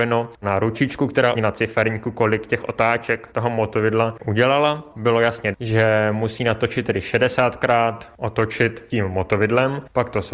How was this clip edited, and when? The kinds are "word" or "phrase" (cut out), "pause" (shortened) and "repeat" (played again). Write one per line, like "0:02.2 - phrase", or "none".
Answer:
0:01.3 - phrase
0:05.5 - word